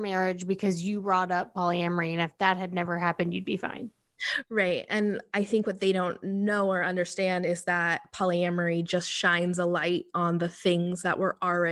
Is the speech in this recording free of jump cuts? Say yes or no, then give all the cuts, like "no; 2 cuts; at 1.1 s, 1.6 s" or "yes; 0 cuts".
yes; 0 cuts